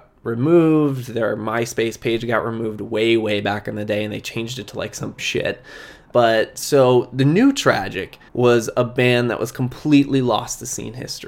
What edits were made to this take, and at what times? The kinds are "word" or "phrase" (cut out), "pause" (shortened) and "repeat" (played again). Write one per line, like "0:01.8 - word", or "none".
0:05.2 - phrase
0:08.3 - pause